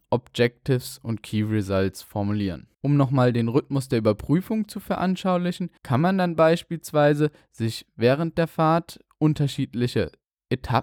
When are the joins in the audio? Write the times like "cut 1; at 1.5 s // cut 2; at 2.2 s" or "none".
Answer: cut 1; at 2.7 s // cut 2; at 5.8 s